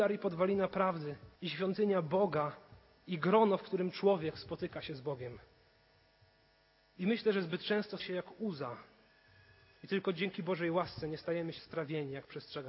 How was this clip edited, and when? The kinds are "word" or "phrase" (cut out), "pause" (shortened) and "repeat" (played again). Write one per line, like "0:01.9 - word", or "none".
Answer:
0:01.4 - pause
0:08.0 - word
0:11.6 - word

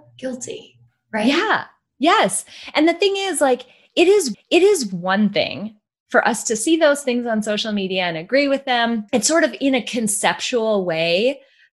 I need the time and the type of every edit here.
0:04.3 - repeat
0:09.1 - pause

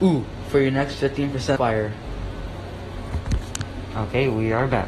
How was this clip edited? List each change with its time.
0:01.6 - word

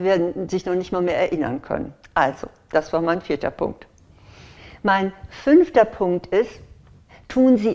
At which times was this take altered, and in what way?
none

